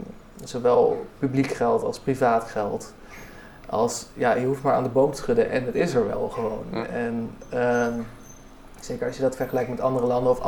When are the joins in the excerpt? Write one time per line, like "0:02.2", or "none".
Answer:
none

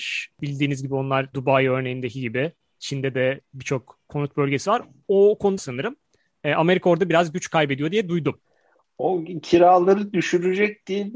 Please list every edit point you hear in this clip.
0:01.3
0:05.6

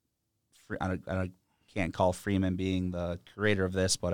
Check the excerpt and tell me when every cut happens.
none

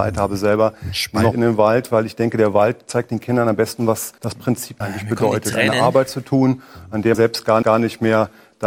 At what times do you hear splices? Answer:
0:01.3
0:04.2
0:04.8
0:07.1
0:07.6

